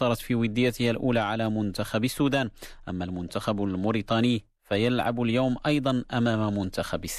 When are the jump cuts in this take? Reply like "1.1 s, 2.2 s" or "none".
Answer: none